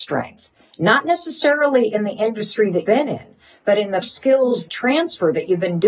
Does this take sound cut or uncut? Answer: cut